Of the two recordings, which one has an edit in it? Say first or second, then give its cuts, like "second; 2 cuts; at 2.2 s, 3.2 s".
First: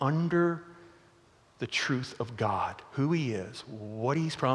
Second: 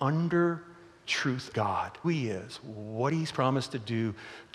second; 3 cuts; at 1.0 s, 1.5 s, 2.0 s